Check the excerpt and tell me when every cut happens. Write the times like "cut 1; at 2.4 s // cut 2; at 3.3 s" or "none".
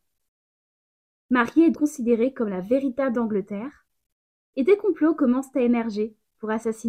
cut 1; at 1.7 s // cut 2; at 3.1 s